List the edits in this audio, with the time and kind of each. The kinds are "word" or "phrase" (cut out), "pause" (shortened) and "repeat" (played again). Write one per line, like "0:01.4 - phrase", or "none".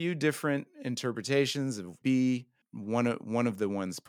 0:02.0 - phrase